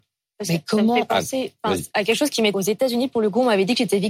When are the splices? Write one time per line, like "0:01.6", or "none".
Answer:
0:02.5